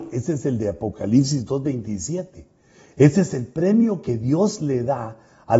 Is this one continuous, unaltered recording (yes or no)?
yes